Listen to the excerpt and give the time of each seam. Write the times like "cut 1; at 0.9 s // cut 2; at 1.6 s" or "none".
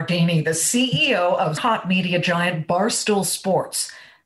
cut 1; at 1.6 s